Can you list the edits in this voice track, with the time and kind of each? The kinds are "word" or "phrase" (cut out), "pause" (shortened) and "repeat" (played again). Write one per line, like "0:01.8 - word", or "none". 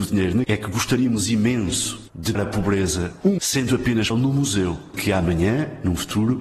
0:02.3 - word
0:03.4 - word
0:04.1 - word